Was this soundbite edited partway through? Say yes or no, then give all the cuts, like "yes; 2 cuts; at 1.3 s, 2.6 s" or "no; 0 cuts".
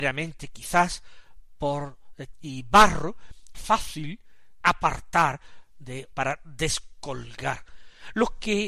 yes; 4 cuts; at 2.3 s, 3.5 s, 4.6 s, 6.1 s